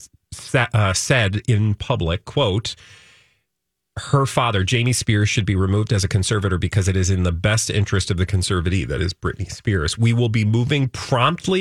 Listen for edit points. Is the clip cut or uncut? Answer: uncut